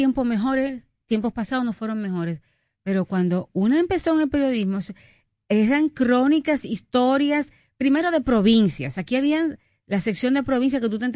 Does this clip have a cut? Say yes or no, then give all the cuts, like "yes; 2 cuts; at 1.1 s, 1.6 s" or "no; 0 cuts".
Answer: no; 0 cuts